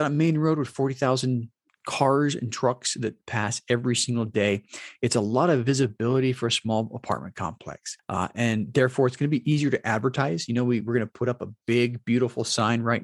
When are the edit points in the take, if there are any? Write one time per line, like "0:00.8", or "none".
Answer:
none